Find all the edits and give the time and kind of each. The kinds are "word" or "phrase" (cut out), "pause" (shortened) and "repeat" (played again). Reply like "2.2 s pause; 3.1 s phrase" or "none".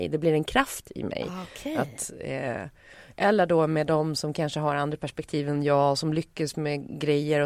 none